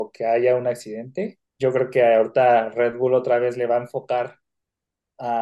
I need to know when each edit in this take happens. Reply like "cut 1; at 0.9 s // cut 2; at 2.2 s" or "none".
cut 1; at 1.5 s

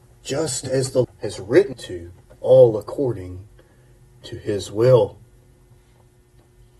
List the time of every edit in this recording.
cut 1; at 1.0 s // cut 2; at 1.7 s

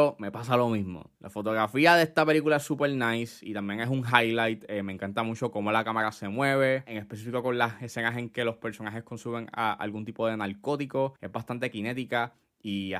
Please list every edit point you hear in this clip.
cut 1; at 1.2 s // cut 2; at 11.2 s

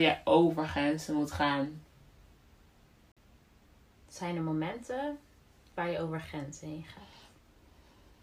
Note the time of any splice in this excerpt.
none

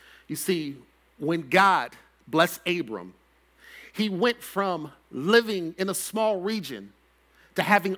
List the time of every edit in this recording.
none

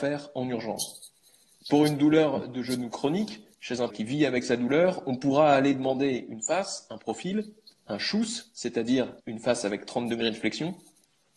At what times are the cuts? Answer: cut 1; at 3.9 s // cut 2; at 9.2 s

